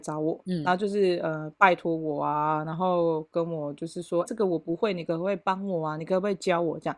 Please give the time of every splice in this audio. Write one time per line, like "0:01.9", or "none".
0:04.3